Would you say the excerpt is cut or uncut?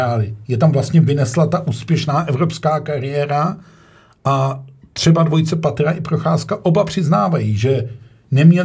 uncut